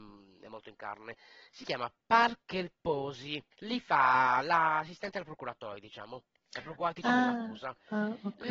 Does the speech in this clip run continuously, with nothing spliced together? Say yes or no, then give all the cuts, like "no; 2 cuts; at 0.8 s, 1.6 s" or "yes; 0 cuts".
no; 1 cut; at 3.5 s